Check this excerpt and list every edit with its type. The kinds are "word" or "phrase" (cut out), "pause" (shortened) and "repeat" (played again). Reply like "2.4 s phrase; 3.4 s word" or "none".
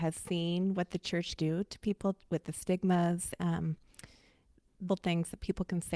1.4 s word; 3.4 s word; 4.9 s word